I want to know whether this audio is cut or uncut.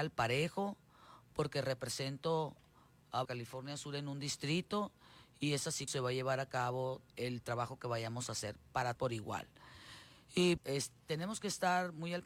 cut